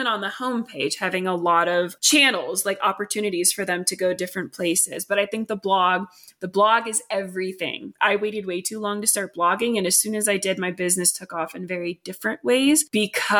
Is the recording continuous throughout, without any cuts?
yes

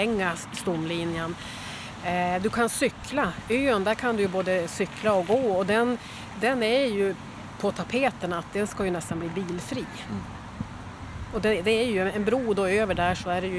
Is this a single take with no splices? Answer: yes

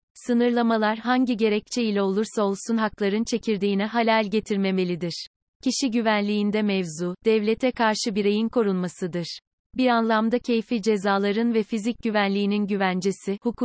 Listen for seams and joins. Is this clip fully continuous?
yes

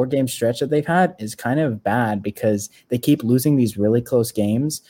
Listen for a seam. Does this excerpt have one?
no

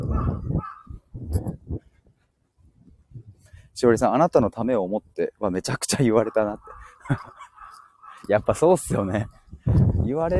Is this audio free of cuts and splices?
yes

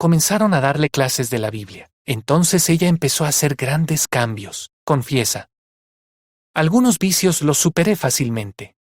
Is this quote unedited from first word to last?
no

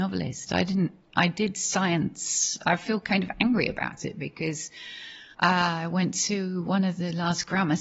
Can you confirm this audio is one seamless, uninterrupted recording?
no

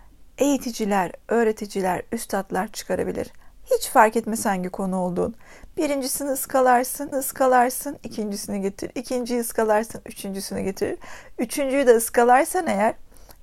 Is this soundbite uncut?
no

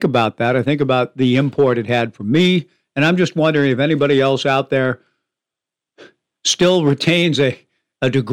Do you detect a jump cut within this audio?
no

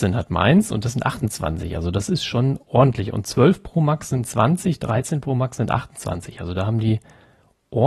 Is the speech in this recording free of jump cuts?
yes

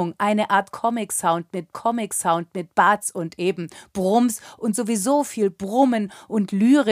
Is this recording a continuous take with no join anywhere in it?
no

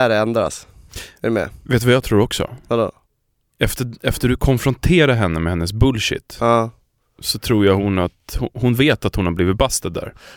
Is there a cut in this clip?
no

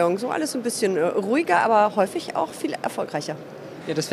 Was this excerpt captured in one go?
yes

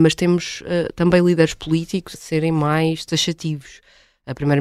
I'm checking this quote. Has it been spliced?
yes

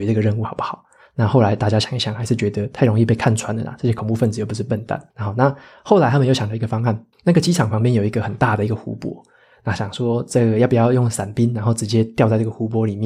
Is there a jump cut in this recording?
yes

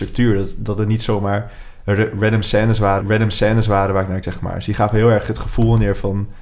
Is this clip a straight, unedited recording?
no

